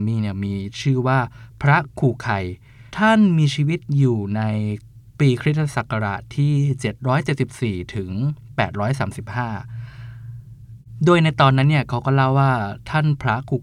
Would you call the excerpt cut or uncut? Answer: cut